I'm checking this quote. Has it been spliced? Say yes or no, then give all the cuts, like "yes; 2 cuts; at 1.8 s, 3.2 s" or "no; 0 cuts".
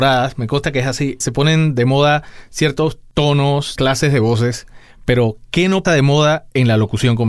yes; 3 cuts; at 1.2 s, 3.8 s, 5.8 s